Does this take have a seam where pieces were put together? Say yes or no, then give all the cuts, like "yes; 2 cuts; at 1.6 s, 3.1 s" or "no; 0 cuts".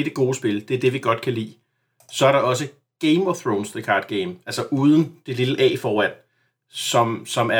no; 0 cuts